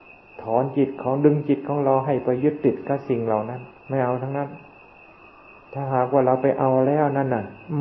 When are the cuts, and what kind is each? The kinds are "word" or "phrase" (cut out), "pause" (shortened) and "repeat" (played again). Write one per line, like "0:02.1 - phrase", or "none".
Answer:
0:03.8 - pause